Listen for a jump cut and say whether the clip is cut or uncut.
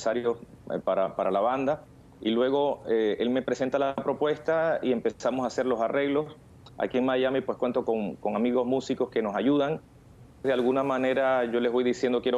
cut